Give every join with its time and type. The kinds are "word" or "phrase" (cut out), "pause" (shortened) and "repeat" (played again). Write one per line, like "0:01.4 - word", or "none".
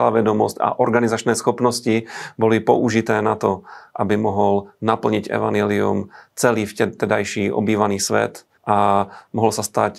0:08.6 - pause